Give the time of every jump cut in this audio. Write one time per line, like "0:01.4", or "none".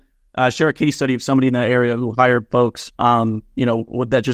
0:02.9